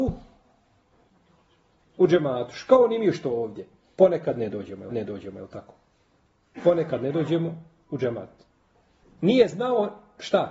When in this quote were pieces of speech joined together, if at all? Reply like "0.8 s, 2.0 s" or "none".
4.9 s